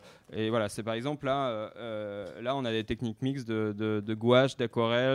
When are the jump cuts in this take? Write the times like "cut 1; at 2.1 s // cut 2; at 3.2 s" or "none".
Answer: none

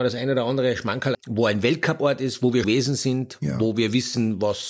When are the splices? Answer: cut 1; at 1.1 s // cut 2; at 2.6 s

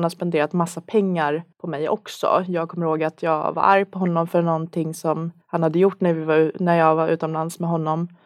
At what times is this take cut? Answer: cut 1; at 1.5 s // cut 2; at 5.4 s

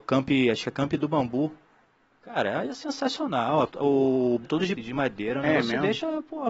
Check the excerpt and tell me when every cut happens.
cut 1; at 3.7 s // cut 2; at 4.4 s // cut 3; at 4.7 s

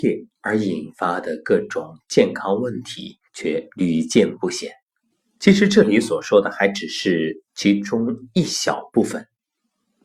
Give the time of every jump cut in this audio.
cut 1; at 3.3 s // cut 2; at 5.1 s // cut 3; at 7.5 s

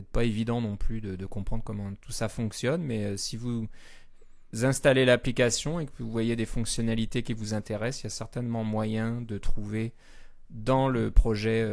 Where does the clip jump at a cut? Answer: none

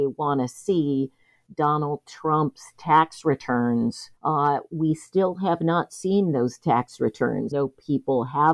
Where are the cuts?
cut 1; at 4.2 s // cut 2; at 7.5 s

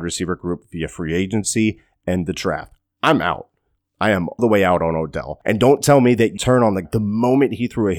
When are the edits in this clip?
cut 1; at 4.4 s // cut 2; at 6.4 s // cut 3; at 6.8 s

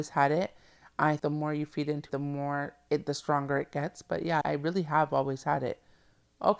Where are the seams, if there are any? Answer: cut 1; at 1.2 s // cut 2; at 2.1 s // cut 3; at 2.9 s // cut 4; at 4.4 s

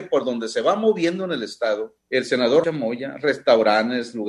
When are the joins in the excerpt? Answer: cut 1; at 2.0 s // cut 2; at 2.6 s

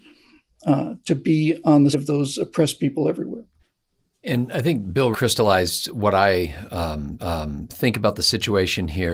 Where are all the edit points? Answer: cut 1; at 1.9 s // cut 2; at 3.6 s // cut 3; at 5.1 s // cut 4; at 7.2 s

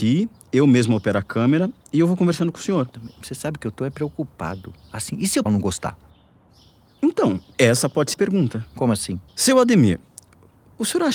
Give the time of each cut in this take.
cut 1; at 5.5 s // cut 2; at 7.5 s // cut 3; at 8.1 s // cut 4; at 9.3 s

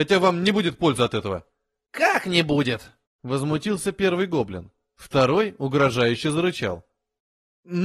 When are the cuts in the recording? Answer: none

